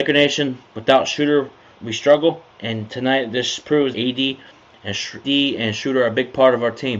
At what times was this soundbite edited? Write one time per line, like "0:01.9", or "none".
0:01.7
0:02.5
0:03.9
0:05.2